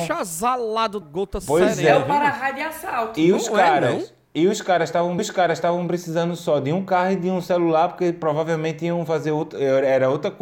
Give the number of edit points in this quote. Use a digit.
2